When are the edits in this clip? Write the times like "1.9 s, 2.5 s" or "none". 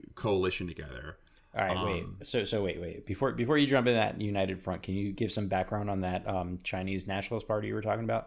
none